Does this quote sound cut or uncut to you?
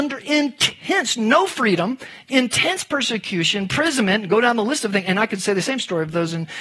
uncut